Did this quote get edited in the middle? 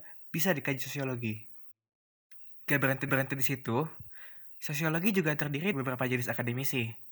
yes; 2 cuts; at 3.1 s, 5.7 s

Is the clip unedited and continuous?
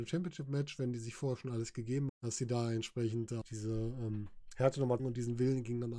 no; 3 cuts; at 2.1 s, 3.4 s, 5.0 s

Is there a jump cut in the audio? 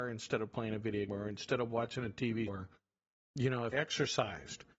yes; 3 cuts; at 1.1 s, 2.5 s, 3.7 s

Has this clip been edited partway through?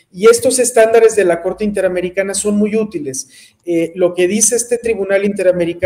no; 0 cuts

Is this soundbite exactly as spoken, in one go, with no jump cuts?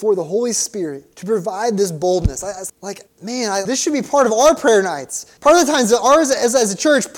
no; 5 cuts; at 1.1 s, 2.7 s, 3.1 s, 3.6 s, 5.4 s

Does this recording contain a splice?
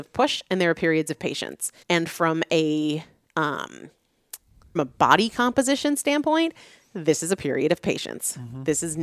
yes; 2 cuts; at 1.8 s, 4.8 s

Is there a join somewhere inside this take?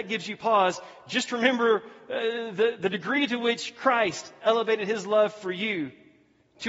no; 0 cuts

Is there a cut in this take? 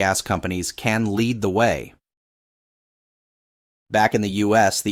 no; 0 cuts

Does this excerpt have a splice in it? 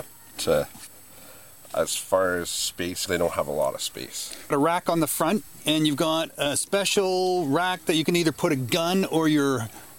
yes; 2 cuts; at 3.1 s, 4.5 s

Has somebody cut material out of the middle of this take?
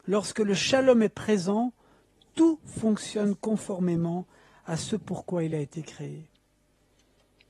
no; 0 cuts

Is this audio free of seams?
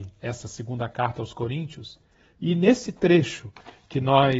yes; 0 cuts

